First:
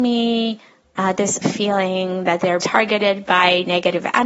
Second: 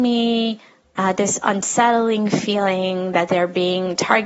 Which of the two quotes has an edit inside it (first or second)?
first